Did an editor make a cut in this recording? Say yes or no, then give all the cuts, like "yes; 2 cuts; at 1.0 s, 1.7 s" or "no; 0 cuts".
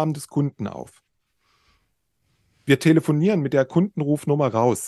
no; 0 cuts